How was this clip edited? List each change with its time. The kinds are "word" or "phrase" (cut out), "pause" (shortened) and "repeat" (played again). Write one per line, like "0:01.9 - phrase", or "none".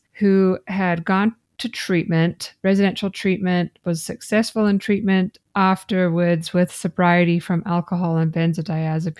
none